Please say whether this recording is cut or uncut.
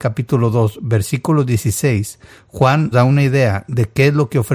cut